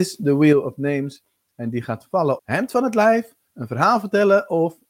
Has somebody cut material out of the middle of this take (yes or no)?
yes